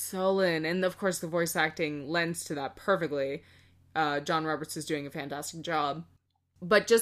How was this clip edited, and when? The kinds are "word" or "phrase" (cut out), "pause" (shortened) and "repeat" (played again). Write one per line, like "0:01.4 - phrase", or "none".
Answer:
none